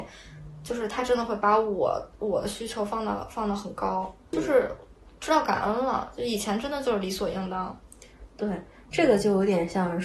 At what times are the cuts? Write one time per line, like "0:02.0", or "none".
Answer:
0:04.3